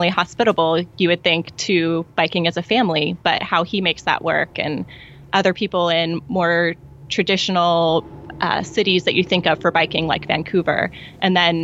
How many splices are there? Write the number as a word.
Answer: zero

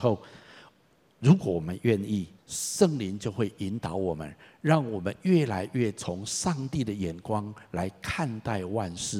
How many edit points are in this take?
one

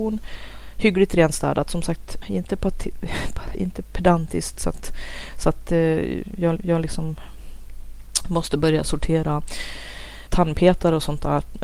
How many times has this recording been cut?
four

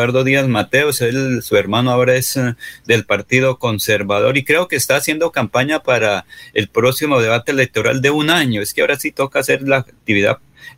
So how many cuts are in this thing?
zero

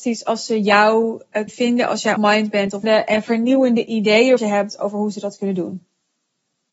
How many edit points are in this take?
four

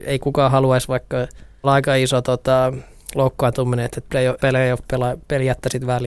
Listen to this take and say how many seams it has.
two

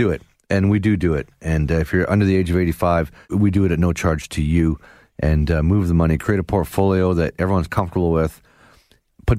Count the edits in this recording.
zero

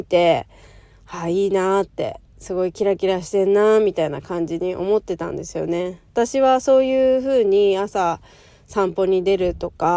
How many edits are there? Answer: two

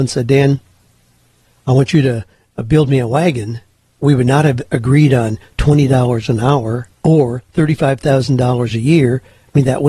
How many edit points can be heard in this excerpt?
one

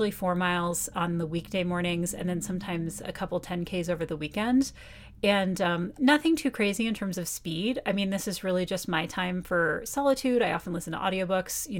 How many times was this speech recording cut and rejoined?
zero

